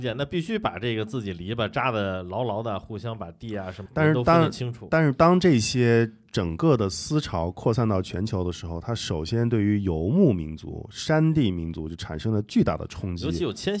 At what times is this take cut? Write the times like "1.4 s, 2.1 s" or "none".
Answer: 3.9 s